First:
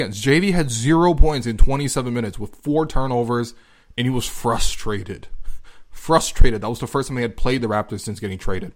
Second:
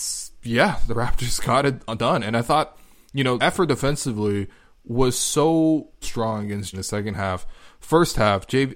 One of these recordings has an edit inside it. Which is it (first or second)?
second